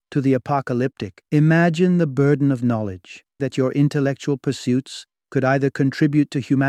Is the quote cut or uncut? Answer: cut